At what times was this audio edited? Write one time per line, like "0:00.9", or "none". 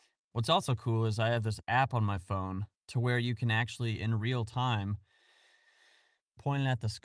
none